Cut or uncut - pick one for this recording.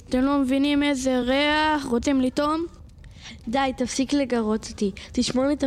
uncut